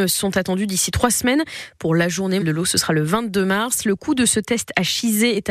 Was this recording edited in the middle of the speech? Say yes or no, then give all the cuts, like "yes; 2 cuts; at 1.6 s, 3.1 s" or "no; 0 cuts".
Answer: yes; 1 cut; at 2.4 s